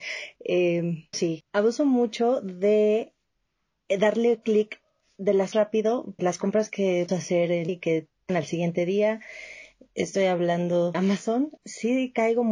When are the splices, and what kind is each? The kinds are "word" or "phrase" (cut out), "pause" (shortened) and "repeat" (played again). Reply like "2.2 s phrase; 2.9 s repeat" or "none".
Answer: 1.1 s word; 5.5 s word; 6.2 s word; 7.1 s word; 7.7 s word; 8.3 s word; 10.9 s word; 11.6 s word